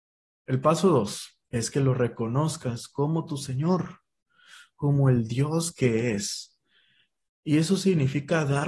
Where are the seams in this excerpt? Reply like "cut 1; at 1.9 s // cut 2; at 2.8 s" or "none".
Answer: cut 1; at 1.4 s